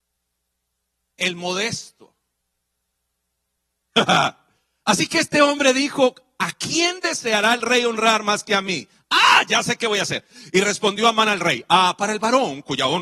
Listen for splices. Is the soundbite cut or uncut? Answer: uncut